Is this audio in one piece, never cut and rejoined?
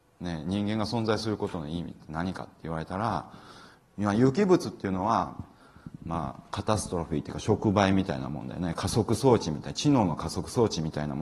yes; 0 cuts

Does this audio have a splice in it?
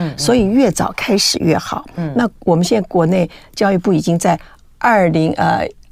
no; 0 cuts

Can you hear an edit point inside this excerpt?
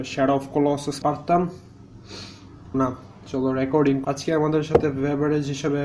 yes; 3 cuts; at 1.0 s, 2.7 s, 4.0 s

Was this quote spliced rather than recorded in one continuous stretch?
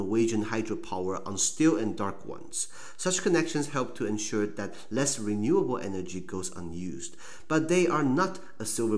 no; 0 cuts

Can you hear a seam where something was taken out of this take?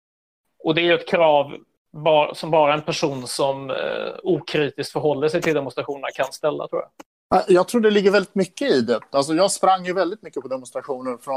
no; 0 cuts

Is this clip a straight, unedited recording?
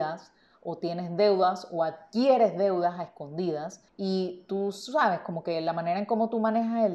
no; 1 cut; at 3.9 s

